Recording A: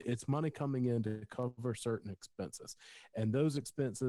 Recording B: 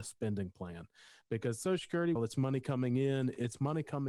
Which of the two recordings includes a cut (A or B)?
B